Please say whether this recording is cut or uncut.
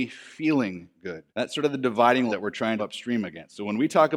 cut